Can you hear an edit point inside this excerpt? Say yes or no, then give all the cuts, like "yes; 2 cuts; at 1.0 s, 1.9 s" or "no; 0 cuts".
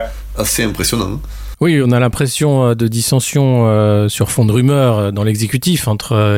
no; 0 cuts